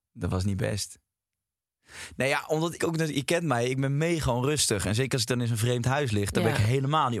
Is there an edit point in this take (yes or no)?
yes